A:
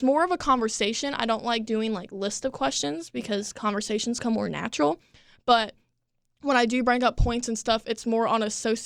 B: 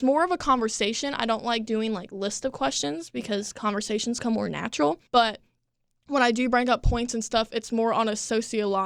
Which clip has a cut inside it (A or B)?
B